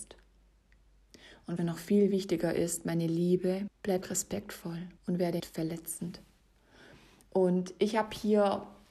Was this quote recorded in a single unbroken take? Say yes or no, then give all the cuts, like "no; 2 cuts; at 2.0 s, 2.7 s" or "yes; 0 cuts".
no; 4 cuts; at 1.6 s, 3.7 s, 5.0 s, 5.4 s